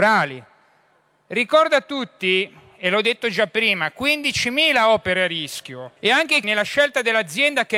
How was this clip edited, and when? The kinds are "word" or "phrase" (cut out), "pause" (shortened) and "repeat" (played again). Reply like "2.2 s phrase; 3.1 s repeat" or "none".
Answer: 6.0 s pause; 6.4 s word